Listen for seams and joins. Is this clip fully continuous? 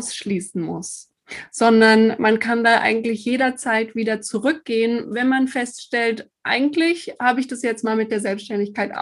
yes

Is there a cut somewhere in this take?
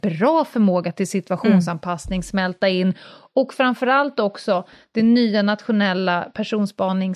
no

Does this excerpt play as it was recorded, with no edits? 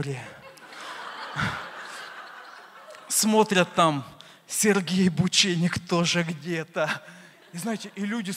yes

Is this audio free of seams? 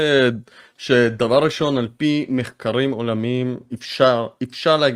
yes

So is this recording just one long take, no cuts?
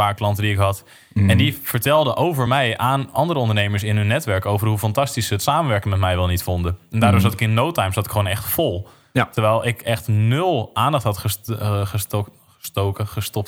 yes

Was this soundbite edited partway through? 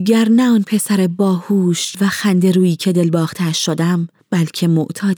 yes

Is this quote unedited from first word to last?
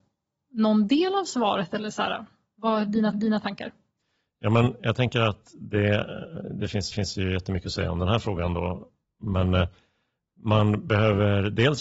no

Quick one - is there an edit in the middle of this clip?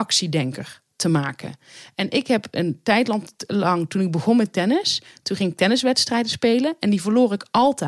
no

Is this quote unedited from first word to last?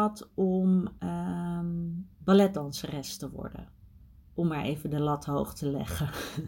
yes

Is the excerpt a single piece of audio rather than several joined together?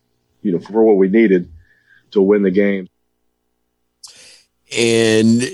yes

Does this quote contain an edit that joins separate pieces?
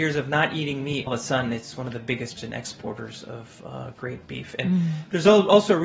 yes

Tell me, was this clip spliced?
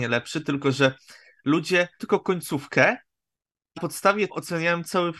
yes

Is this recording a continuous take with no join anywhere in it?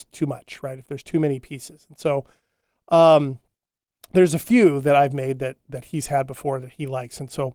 yes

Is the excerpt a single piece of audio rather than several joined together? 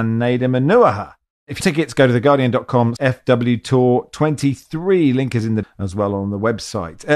no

